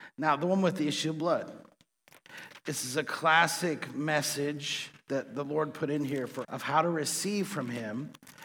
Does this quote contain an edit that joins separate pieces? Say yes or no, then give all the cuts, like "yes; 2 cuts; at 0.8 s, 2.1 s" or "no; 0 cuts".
yes; 1 cut; at 6.4 s